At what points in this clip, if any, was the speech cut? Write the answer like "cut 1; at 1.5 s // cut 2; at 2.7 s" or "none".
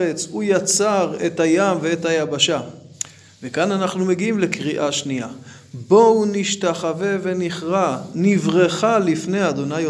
none